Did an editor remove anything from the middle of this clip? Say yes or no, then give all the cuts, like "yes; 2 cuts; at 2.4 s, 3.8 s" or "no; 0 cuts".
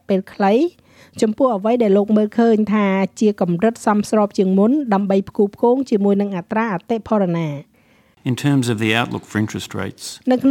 no; 0 cuts